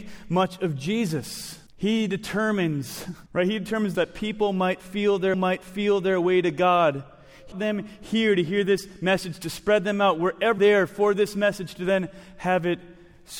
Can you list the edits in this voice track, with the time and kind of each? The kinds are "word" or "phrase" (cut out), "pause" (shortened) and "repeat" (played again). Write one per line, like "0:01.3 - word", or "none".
0:01.7 - pause
0:03.3 - pause
0:03.9 - phrase
0:05.3 - repeat
0:07.5 - word
0:10.6 - phrase

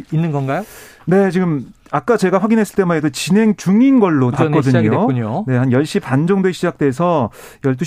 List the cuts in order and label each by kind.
0:04.3 - word

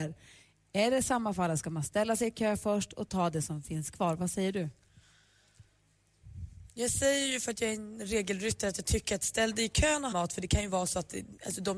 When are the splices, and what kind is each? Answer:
0:10.1 - phrase

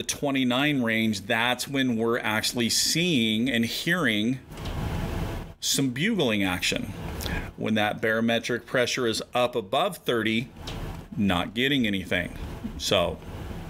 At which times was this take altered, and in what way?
none

